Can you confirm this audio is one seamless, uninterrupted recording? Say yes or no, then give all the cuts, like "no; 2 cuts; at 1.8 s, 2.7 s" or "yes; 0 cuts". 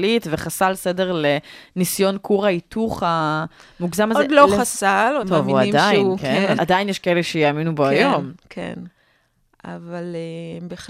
no; 2 cuts; at 5.2 s, 6.6 s